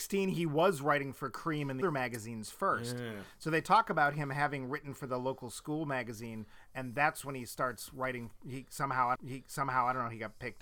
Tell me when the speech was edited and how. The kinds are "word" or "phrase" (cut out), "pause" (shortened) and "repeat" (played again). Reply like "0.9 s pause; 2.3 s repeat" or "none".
1.8 s word; 9.2 s repeat